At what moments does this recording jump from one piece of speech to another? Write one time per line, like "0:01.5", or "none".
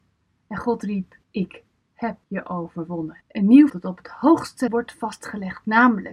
0:01.2
0:02.2
0:03.2
0:03.7
0:04.7